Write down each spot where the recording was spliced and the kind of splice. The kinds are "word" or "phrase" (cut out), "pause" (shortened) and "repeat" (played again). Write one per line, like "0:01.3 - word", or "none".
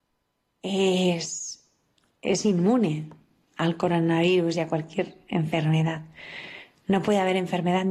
none